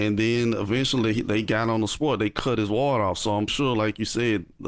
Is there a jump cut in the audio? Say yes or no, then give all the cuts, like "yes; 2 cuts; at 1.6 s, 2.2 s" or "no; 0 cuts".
yes; 1 cut; at 3.5 s